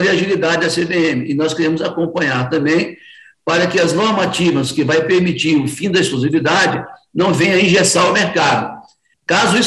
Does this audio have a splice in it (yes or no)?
no